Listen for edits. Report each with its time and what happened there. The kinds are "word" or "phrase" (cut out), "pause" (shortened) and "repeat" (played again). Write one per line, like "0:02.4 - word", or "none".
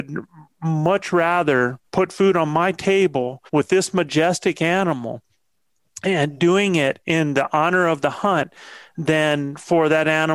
0:01.9 - pause
0:03.5 - pause
0:07.0 - word